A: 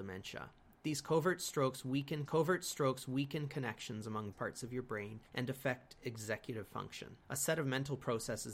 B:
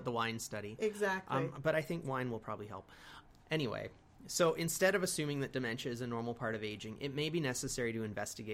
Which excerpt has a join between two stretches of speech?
A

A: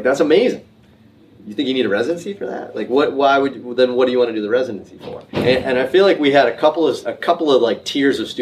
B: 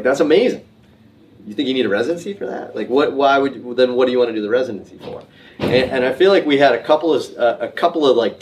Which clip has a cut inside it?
A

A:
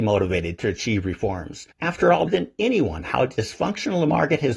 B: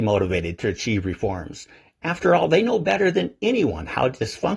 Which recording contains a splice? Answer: A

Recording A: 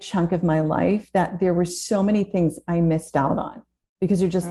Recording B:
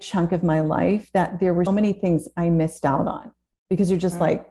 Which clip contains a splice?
B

